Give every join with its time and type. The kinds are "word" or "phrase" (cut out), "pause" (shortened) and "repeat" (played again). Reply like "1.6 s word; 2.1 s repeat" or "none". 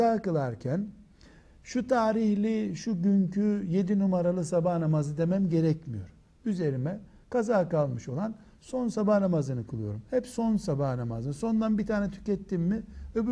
none